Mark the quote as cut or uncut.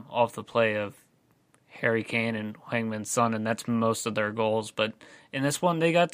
uncut